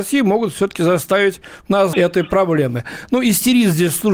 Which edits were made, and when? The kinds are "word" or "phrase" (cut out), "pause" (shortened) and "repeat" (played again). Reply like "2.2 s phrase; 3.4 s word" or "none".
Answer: 1.9 s word